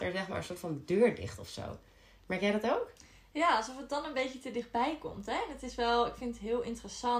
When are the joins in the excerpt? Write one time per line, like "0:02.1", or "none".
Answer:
none